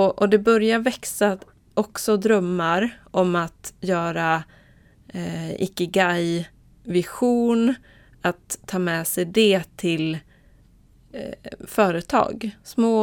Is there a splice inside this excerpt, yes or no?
no